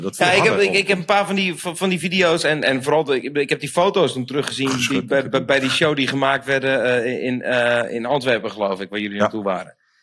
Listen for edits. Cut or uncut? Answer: uncut